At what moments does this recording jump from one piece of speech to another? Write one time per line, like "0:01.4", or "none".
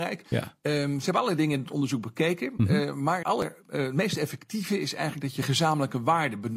0:03.2

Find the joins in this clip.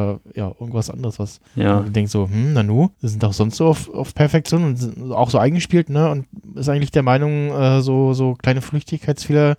0:01.5
0:02.9
0:06.5

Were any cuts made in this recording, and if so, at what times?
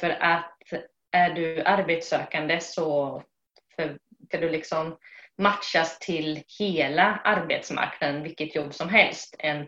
0:04.3
0:06.5

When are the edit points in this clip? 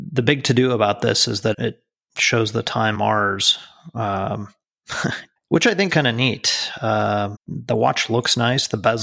0:01.5
0:02.9
0:05.4
0:05.9
0:07.3

